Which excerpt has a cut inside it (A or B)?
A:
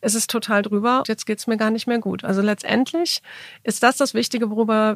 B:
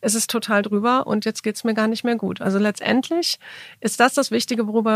A